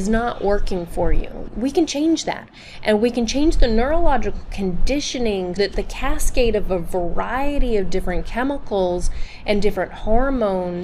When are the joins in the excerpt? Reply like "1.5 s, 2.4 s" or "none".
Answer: 1.5 s, 5.6 s